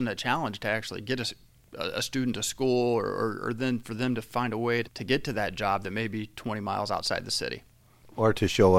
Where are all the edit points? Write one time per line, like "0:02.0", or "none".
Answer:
0:04.8